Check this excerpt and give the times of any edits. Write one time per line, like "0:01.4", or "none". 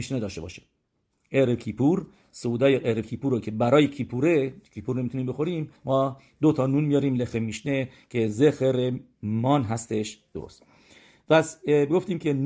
0:05.8